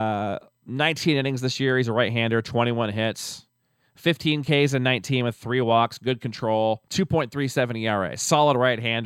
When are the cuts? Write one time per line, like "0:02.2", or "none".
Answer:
0:06.9